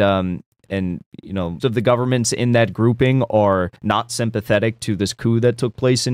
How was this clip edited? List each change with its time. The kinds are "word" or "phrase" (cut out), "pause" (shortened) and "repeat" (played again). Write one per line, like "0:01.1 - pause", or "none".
0:01.6 - word
0:03.8 - pause